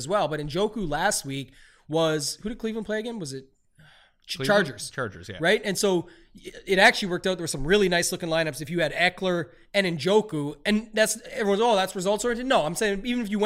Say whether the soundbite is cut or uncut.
uncut